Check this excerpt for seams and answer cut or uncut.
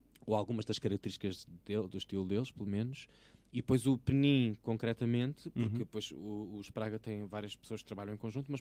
uncut